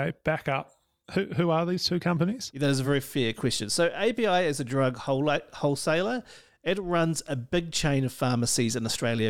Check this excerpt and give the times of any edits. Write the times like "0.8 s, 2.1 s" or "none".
none